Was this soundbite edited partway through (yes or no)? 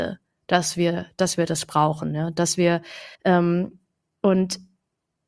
yes